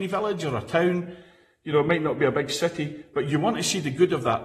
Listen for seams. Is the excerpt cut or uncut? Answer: uncut